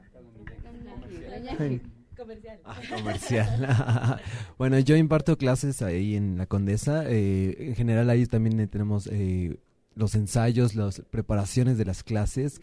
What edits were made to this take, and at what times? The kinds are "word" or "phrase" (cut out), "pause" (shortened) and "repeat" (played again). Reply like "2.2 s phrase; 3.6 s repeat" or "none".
none